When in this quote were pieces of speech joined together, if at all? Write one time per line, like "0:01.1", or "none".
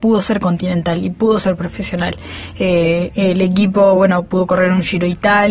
none